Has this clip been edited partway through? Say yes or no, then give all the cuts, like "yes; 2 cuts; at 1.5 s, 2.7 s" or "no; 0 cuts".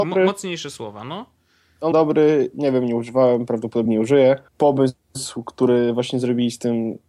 yes; 3 cuts; at 1.9 s, 3.9 s, 4.5 s